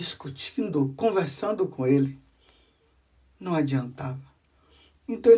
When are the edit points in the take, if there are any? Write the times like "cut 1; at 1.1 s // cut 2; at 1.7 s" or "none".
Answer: none